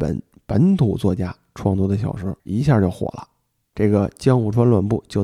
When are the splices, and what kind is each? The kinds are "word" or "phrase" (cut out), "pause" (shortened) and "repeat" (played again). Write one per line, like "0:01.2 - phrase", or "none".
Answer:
0:02.4 - word